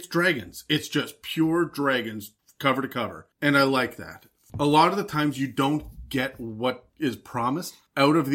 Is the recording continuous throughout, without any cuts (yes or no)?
yes